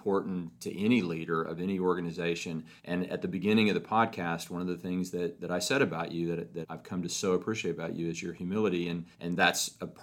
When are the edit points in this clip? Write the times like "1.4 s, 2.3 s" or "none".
2.8 s, 6.6 s, 9.1 s